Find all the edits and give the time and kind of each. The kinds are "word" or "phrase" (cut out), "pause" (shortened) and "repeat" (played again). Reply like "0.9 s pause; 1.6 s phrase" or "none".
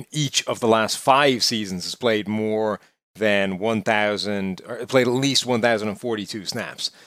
none